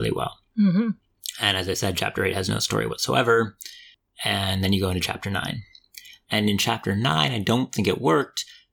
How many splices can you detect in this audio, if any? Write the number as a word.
zero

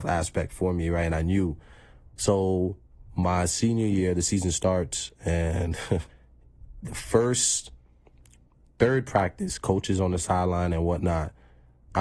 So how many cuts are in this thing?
one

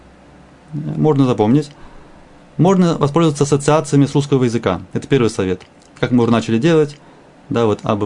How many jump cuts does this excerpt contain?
zero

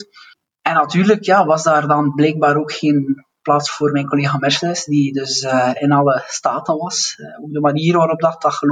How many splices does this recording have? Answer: zero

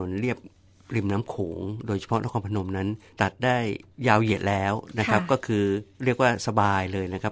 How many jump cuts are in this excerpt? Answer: one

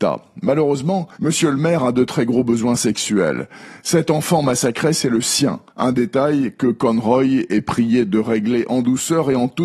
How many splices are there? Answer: two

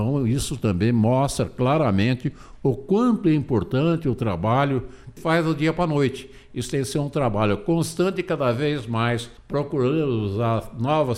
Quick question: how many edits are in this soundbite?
two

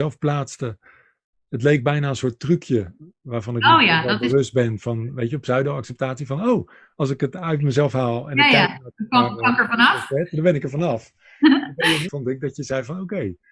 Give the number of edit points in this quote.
one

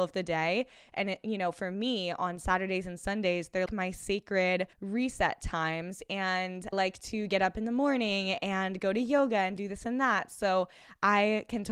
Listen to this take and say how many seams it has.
three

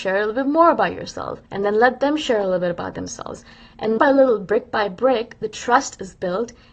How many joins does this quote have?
two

